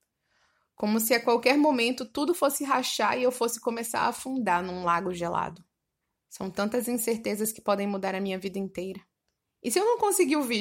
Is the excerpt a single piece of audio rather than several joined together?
no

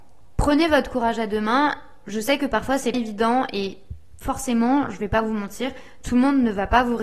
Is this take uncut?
no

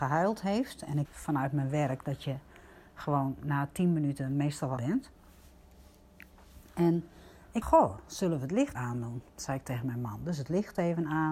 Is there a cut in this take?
yes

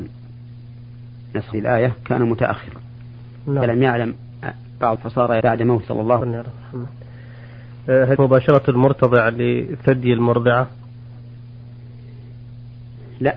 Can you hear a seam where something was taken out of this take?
yes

